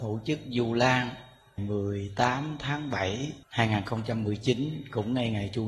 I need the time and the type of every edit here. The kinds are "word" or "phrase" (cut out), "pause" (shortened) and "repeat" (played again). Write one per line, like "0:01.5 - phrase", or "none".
0:01.6 - phrase
0:03.4 - pause